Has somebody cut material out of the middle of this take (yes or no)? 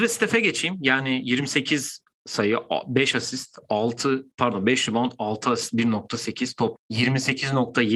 yes